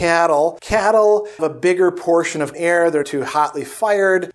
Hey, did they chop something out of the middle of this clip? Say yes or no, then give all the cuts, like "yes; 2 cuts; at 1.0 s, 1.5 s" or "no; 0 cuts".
yes; 3 cuts; at 1.4 s, 2.5 s, 3.0 s